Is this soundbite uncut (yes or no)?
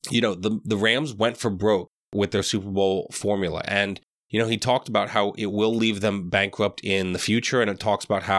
yes